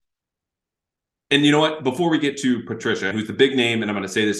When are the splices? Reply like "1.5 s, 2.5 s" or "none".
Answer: 3.1 s